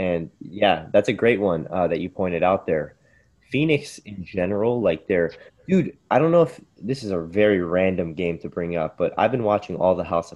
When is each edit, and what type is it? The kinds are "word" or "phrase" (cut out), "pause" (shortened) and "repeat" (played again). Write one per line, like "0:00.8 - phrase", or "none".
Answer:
none